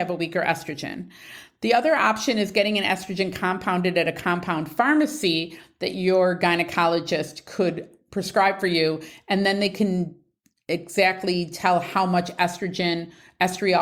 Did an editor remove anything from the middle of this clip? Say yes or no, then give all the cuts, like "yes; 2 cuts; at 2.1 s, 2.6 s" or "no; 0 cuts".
no; 0 cuts